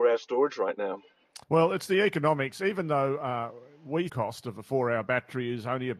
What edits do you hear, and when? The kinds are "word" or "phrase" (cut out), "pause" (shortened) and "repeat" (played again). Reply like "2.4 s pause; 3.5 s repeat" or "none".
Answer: 1.4 s pause; 4.1 s phrase